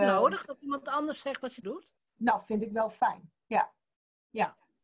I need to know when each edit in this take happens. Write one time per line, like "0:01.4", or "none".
0:01.6